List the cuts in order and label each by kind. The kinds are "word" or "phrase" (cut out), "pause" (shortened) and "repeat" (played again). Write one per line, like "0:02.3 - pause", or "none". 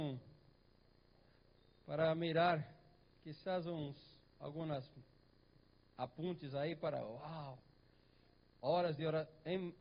0:03.0 - word